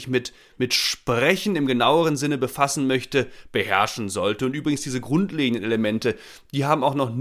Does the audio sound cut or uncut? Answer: uncut